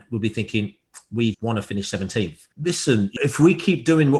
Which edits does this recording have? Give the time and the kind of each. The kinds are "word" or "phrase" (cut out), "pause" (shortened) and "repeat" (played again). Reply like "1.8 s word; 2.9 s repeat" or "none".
1.3 s word; 2.5 s pause; 3.2 s word